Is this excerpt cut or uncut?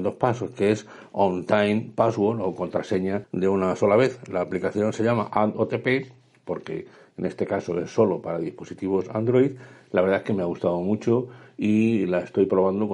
uncut